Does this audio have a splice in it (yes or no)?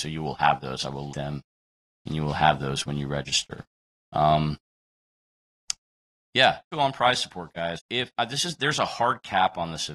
yes